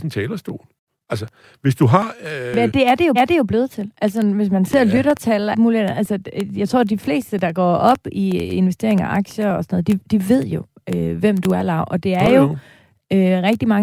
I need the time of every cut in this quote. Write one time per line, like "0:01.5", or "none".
0:02.7
0:03.2
0:05.5